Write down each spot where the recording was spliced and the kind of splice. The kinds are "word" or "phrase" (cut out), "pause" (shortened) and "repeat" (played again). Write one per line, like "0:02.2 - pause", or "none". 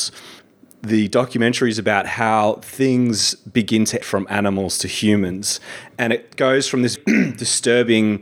0:04.0 - word
0:07.0 - word